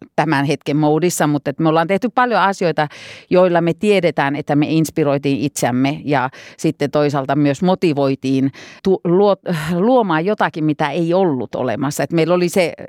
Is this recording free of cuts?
no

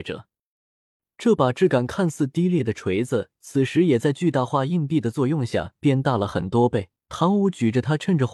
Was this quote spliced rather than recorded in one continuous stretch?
yes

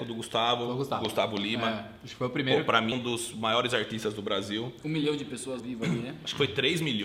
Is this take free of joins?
no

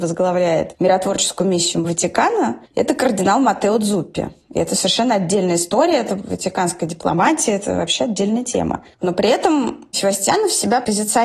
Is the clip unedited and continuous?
no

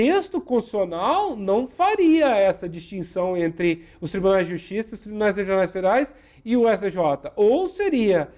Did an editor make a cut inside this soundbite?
no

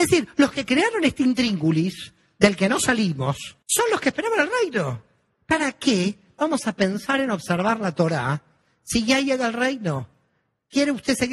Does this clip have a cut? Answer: yes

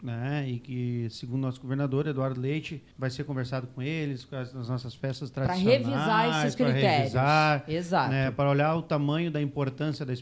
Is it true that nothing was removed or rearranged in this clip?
no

